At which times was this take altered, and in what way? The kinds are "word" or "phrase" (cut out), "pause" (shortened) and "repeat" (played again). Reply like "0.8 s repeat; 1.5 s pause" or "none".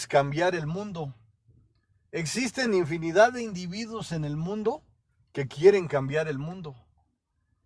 none